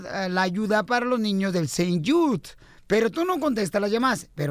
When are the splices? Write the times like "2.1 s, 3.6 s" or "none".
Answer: none